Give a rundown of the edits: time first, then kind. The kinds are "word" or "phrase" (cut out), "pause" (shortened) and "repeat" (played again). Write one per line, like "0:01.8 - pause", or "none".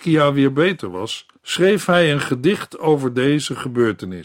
0:01.4 - pause